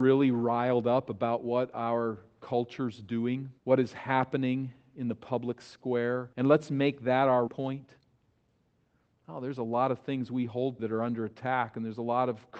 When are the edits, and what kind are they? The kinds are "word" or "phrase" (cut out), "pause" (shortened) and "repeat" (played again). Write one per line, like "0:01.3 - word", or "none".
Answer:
0:03.6 - pause
0:06.3 - pause
0:07.5 - word
0:10.8 - word